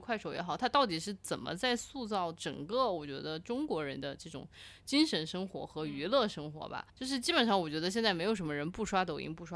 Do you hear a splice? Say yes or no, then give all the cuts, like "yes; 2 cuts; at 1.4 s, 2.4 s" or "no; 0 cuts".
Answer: yes; 1 cut; at 6.9 s